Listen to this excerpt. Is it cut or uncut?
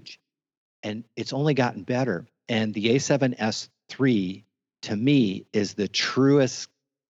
uncut